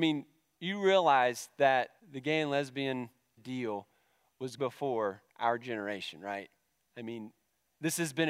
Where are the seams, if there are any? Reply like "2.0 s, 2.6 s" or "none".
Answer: 2.0 s, 3.4 s, 4.6 s, 5.3 s